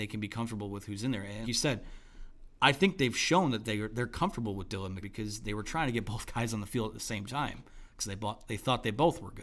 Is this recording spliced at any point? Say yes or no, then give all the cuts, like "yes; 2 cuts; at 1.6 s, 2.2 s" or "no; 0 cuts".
yes; 2 cuts; at 1.4 s, 5.0 s